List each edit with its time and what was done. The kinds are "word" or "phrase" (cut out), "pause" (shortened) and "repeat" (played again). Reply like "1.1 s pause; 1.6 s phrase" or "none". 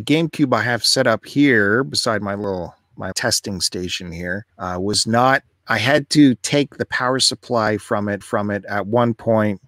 3.1 s word; 4.5 s pause; 8.2 s repeat